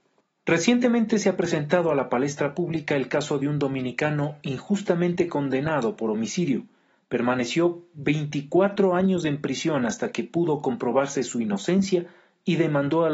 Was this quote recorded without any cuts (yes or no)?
yes